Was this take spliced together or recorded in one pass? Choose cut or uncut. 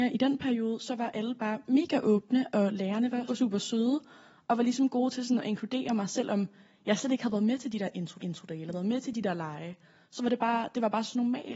cut